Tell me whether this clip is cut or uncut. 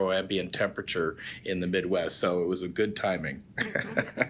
uncut